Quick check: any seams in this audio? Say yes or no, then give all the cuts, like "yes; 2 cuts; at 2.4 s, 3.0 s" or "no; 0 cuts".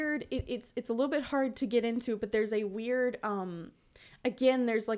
no; 0 cuts